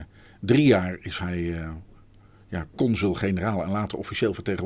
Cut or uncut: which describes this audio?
uncut